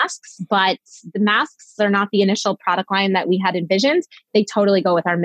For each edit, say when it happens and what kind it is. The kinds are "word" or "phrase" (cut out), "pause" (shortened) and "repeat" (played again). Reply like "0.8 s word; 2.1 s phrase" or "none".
1.8 s word